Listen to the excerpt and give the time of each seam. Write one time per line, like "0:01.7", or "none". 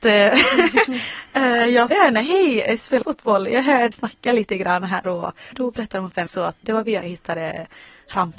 0:01.9
0:03.0
0:03.9
0:05.0
0:05.5
0:06.3
0:06.6
0:07.0